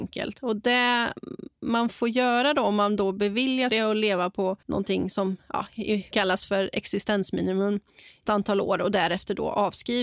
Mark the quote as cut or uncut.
cut